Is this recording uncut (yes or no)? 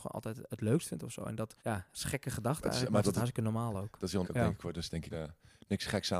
no